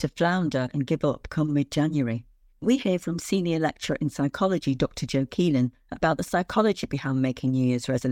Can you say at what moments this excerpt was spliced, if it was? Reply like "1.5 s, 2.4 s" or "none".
none

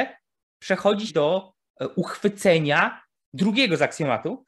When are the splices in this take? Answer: 1.1 s

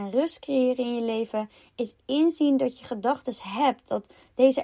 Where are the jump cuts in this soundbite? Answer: none

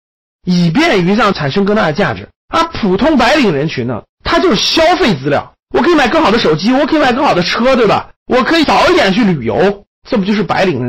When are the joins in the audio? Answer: 2.4 s, 4.1 s, 5.6 s, 8.2 s

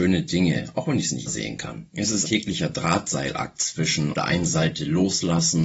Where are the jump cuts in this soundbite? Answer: 1.3 s, 2.2 s, 4.1 s

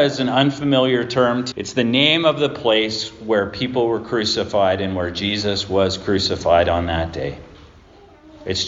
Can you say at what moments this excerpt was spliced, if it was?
1.5 s

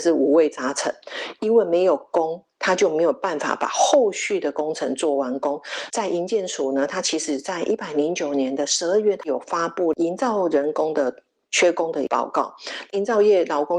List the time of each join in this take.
none

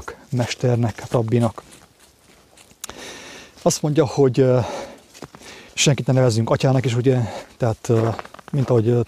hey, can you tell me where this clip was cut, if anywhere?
5.7 s

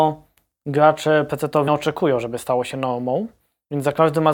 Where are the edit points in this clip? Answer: 1.7 s

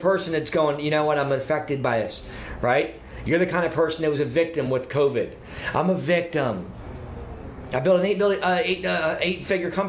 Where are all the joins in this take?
none

